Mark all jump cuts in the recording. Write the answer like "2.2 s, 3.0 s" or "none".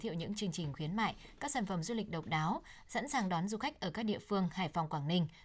none